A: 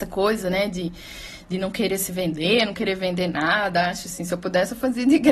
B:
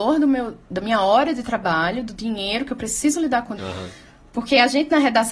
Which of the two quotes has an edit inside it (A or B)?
B